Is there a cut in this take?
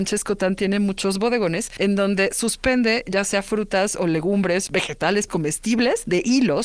yes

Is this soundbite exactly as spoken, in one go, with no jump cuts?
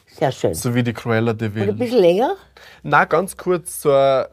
yes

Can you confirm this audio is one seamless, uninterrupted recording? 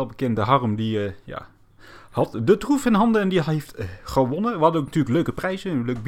yes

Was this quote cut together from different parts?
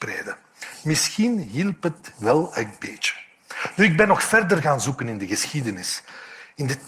yes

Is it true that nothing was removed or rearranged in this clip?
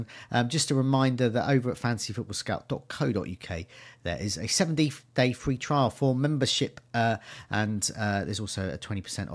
yes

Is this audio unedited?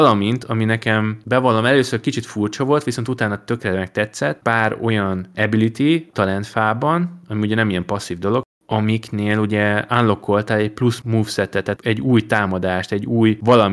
no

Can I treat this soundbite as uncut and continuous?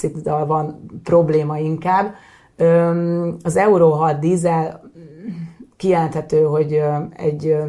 yes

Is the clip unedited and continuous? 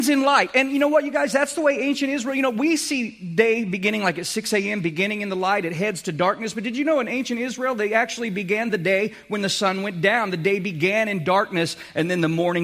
yes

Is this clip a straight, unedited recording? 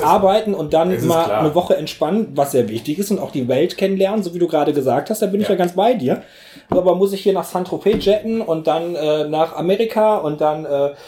yes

